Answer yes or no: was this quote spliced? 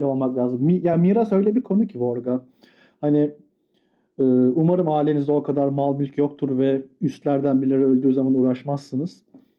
no